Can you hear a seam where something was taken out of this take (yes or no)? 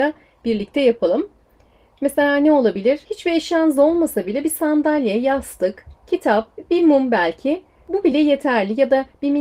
no